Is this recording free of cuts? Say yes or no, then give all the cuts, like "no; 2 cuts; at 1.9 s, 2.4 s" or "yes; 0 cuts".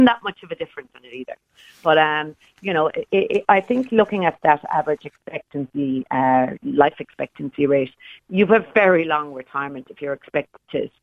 yes; 0 cuts